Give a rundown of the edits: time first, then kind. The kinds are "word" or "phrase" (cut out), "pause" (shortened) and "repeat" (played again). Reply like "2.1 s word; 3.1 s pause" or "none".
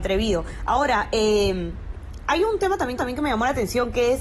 3.0 s repeat